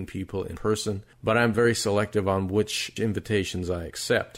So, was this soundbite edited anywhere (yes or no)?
no